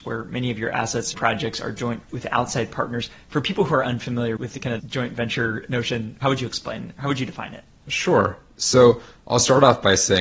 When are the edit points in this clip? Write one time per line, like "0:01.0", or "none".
0:01.1
0:02.0
0:04.4
0:04.8
0:06.2